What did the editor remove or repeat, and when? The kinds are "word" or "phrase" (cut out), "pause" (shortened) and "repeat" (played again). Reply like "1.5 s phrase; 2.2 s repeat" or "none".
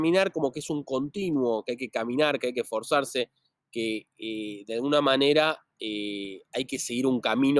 none